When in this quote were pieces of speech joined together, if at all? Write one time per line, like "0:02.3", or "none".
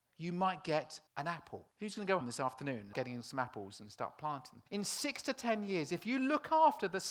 0:01.1
0:01.7
0:02.2
0:02.9
0:04.7